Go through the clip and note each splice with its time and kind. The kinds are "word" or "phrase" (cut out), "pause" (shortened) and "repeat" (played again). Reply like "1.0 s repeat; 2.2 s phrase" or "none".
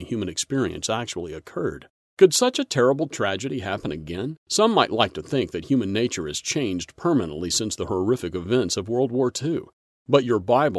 2.0 s pause; 4.4 s pause

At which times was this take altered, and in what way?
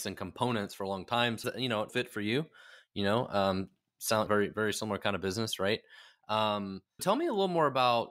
1.4 s word; 1.9 s word; 4.3 s phrase; 7.0 s word

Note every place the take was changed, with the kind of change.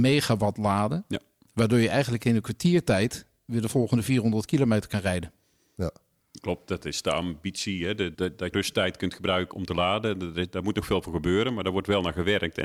8.1 s word; 8.5 s word; 9.5 s word

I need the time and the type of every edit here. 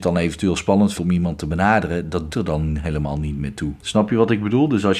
0.9 s word; 2.3 s word; 3.8 s pause

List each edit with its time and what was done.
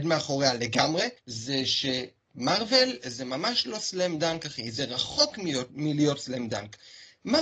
1.2 s pause

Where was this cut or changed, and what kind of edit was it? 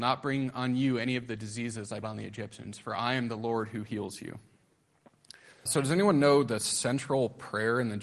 2.0 s word; 5.7 s word

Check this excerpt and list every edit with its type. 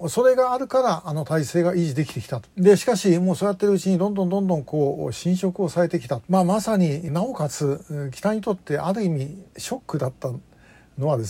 2.5 s pause; 6.2 s pause; 7.1 s word; 9.5 s pause

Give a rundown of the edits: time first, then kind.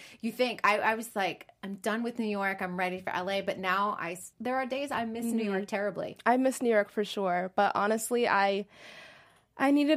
4.3 s pause

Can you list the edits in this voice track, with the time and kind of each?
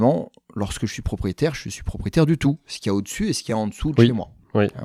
none

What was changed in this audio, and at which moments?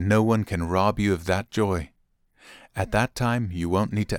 none

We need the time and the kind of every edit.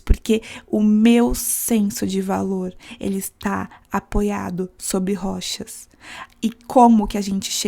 none

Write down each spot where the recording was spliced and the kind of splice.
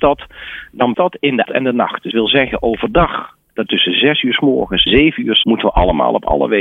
0.9 s word; 1.4 s word; 2.1 s word; 3.7 s word; 4.9 s word; 5.4 s word

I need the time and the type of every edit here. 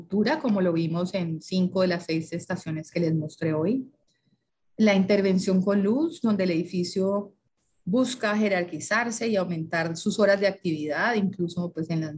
none

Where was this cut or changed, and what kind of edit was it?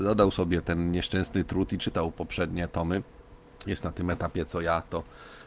none

